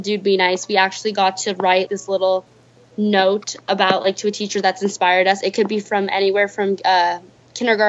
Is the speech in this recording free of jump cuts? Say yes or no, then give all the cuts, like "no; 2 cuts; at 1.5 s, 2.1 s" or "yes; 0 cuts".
no; 1 cut; at 1.9 s